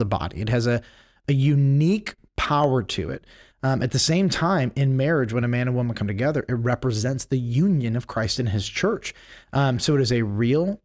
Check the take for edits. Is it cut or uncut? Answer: uncut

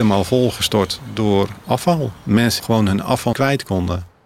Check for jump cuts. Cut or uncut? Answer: cut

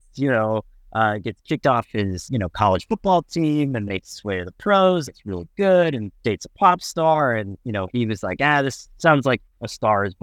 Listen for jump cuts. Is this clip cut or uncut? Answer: cut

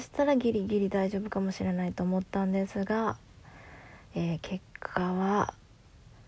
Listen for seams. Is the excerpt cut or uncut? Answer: uncut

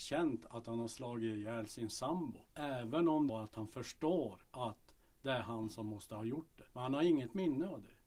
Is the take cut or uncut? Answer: cut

